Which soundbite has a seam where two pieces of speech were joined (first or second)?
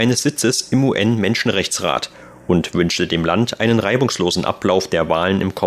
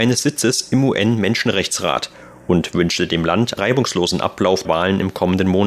second